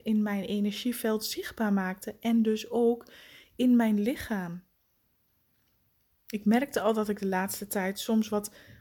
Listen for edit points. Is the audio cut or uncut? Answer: uncut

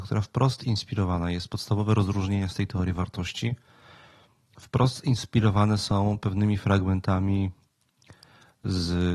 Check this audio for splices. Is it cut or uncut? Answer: uncut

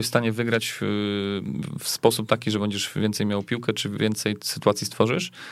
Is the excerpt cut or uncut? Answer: uncut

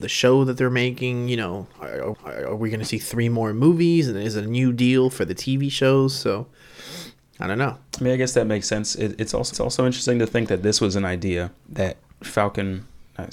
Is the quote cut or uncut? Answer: cut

